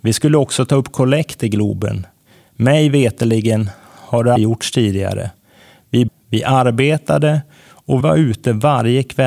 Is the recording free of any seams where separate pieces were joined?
no; 3 cuts; at 4.4 s, 6.1 s, 8.0 s

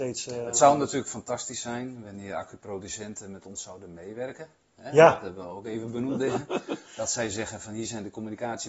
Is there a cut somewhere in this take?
no; 0 cuts

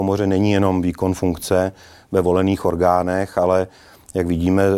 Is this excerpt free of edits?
yes; 0 cuts

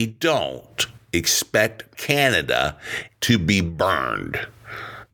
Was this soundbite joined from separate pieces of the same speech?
yes; 2 cuts; at 1.9 s, 3.1 s

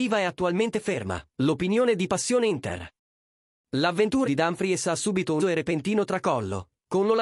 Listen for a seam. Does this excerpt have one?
yes; 3 cuts; at 1.3 s, 4.2 s, 5.4 s

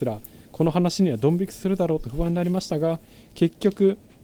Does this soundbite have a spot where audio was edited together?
no; 0 cuts

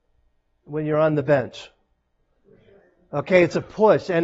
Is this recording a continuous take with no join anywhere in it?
yes; 0 cuts

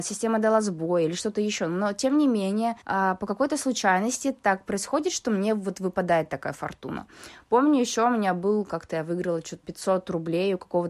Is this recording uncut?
no; 2 cuts; at 2.8 s, 9.6 s

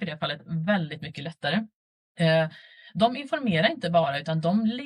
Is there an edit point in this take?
no; 0 cuts

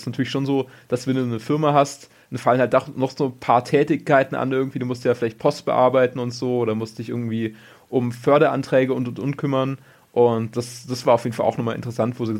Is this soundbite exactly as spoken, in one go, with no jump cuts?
yes; 0 cuts

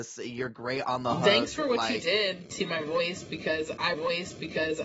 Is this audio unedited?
no; 1 cut; at 3.9 s

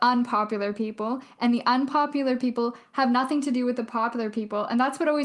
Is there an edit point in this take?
no; 0 cuts

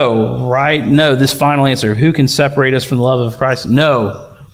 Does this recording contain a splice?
no; 0 cuts

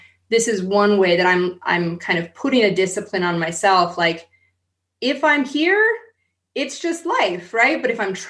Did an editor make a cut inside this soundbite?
no; 0 cuts

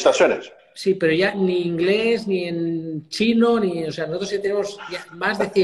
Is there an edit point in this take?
no; 0 cuts

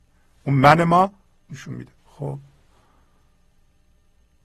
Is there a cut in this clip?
yes; 2 cuts; at 1.5 s, 2.0 s

